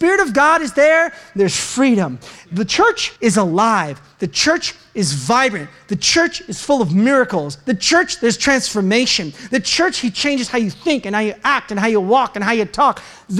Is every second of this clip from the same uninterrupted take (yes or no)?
no